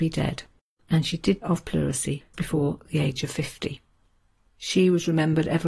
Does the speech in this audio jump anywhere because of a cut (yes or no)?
yes